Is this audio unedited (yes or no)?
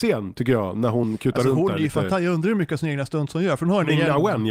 yes